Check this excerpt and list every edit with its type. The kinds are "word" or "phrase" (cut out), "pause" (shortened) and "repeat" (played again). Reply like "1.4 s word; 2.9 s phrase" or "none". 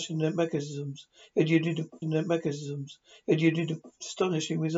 2.0 s repeat